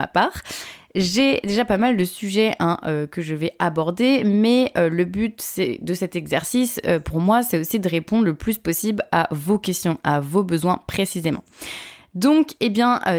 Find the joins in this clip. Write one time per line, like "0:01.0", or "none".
none